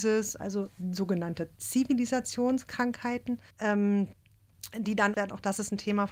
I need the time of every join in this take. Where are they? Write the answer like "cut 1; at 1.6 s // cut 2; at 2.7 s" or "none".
cut 1; at 3.5 s // cut 2; at 5.1 s